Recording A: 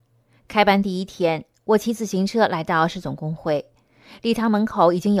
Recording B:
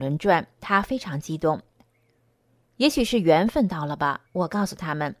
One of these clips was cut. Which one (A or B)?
B